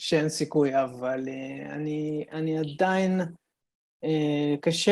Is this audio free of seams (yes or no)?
yes